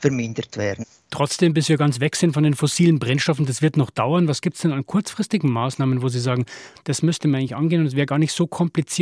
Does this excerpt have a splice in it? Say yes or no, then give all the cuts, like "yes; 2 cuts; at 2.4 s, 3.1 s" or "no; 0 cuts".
no; 0 cuts